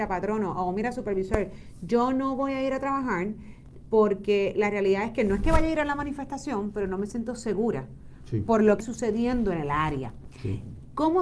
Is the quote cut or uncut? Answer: cut